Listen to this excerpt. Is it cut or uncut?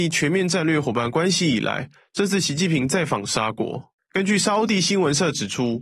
uncut